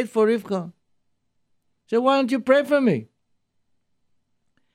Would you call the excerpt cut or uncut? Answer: uncut